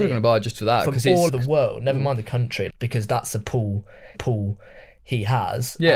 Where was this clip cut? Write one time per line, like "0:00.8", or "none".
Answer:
0:01.3
0:02.7
0:04.1